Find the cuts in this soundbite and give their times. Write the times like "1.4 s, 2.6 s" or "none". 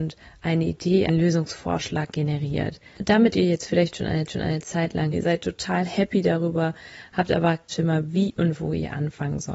1.1 s, 3.3 s, 4.3 s, 5.1 s, 7.7 s